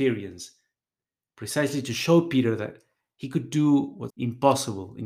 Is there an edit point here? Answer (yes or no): yes